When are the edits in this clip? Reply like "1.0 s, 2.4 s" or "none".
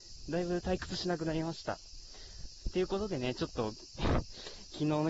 none